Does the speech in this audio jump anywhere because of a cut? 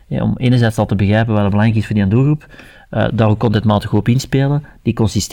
no; 0 cuts

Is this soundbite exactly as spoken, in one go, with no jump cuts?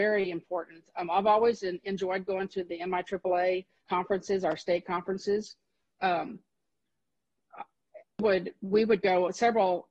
no; 2 cuts; at 3.9 s, 8.2 s

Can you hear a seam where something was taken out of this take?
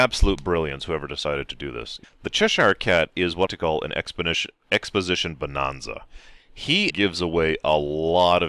yes; 3 cuts; at 2.0 s, 3.5 s, 6.9 s

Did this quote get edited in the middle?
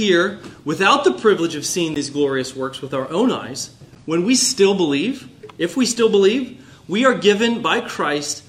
no; 0 cuts

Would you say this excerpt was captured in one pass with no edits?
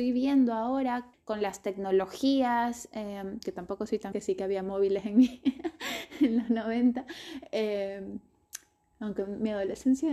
no; 2 cuts; at 1.1 s, 4.1 s

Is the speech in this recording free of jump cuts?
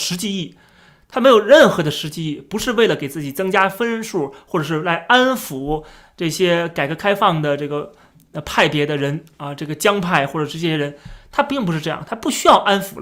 yes; 0 cuts

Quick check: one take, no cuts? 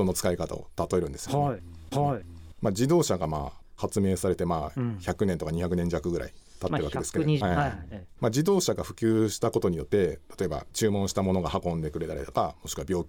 no; 2 cuts; at 1.9 s, 7.4 s

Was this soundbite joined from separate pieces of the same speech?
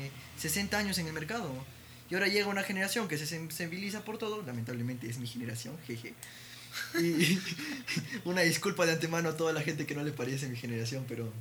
no; 0 cuts

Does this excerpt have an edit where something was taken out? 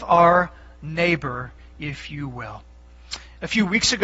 no; 0 cuts

